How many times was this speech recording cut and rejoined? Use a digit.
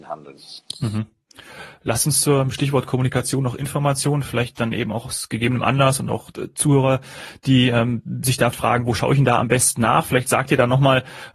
1